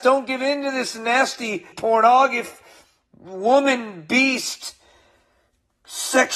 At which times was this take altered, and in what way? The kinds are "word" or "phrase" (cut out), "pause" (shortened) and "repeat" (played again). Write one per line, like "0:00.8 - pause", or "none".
0:01.7 - word

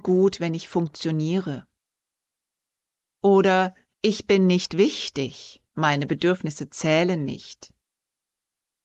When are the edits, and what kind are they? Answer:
none

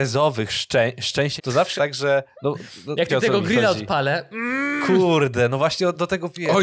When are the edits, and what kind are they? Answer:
0:01.4 - word
0:01.8 - word
0:03.1 - word

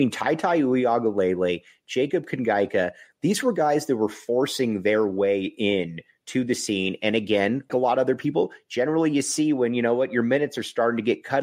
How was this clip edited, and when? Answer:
0:07.7 - word

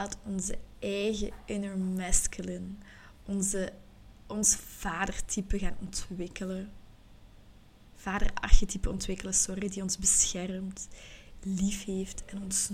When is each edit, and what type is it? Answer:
none

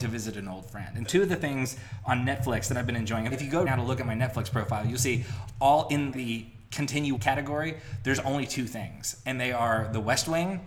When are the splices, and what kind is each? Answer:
0:01.0 - word
0:03.3 - word
0:03.7 - word
0:06.1 - word
0:07.2 - word

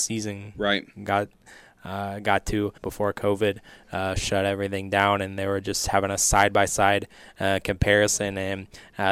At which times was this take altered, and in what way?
0:02.8 - pause

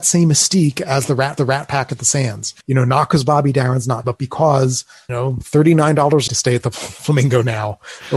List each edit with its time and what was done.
0:01.4 - repeat
0:02.6 - pause
0:04.0 - word
0:05.1 - phrase
0:06.3 - phrase

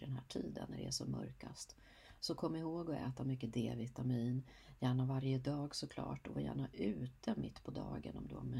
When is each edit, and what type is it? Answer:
none

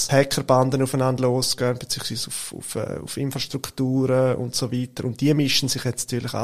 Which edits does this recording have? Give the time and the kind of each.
none

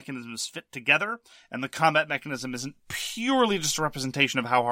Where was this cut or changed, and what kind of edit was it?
none

